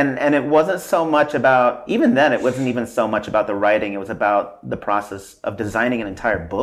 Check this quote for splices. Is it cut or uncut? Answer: uncut